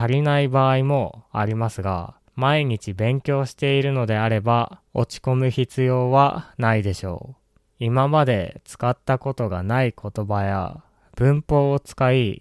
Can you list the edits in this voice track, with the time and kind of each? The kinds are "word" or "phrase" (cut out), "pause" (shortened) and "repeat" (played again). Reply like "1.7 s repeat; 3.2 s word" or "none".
2.3 s pause; 4.9 s pause; 7.7 s pause